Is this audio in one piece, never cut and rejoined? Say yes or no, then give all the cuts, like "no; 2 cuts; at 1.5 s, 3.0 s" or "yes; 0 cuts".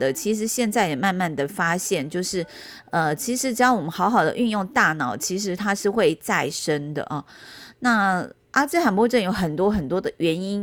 yes; 0 cuts